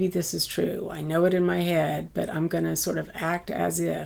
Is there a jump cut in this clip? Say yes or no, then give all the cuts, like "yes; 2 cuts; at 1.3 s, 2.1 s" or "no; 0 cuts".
no; 0 cuts